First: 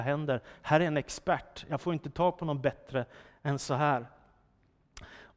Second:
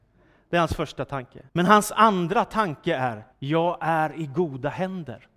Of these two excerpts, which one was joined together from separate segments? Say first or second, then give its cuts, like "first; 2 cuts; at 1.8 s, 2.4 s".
second; 2 cuts; at 1.5 s, 3.3 s